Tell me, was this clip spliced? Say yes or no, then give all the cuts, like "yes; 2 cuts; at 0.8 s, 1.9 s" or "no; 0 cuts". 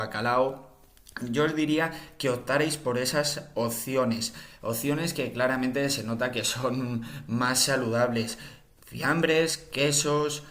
no; 0 cuts